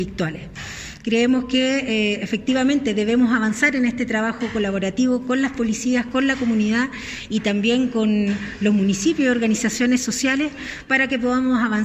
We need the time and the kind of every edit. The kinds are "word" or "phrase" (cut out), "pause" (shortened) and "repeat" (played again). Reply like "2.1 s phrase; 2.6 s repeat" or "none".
none